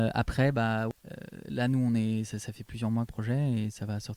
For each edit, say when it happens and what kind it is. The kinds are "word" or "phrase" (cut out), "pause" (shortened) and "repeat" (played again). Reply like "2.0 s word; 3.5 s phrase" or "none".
3.1 s phrase